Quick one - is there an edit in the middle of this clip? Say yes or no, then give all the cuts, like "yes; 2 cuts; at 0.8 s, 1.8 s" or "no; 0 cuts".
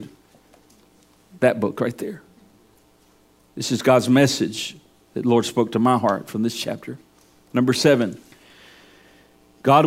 no; 0 cuts